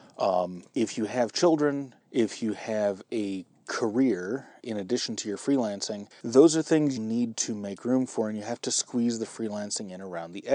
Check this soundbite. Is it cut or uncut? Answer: cut